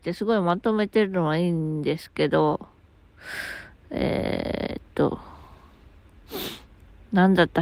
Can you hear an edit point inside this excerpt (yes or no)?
no